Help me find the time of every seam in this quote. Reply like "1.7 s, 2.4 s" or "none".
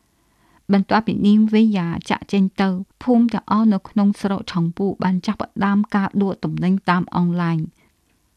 2.9 s